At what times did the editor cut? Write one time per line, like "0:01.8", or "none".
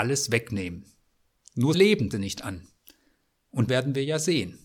0:01.7
0:02.1
0:03.7